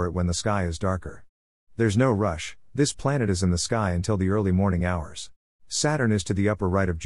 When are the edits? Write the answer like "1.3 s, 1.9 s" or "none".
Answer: 5.4 s